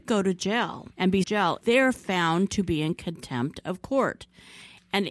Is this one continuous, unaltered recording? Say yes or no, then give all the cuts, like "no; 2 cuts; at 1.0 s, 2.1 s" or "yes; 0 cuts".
no; 3 cuts; at 0.9 s, 1.2 s, 1.6 s